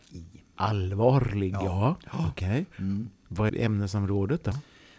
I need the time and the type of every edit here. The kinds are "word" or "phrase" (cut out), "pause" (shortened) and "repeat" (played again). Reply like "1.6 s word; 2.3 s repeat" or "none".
3.5 s word